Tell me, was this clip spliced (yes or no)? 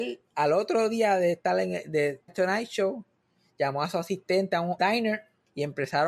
yes